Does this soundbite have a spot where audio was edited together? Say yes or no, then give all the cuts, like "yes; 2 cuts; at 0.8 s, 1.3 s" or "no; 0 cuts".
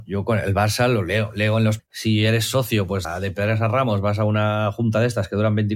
yes; 2 cuts; at 1.8 s, 3.0 s